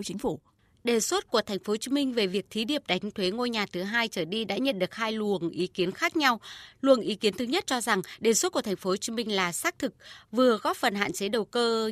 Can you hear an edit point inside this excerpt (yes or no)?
no